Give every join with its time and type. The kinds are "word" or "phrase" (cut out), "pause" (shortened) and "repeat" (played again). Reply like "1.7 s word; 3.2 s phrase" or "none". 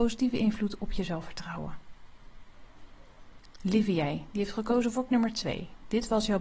5.1 s word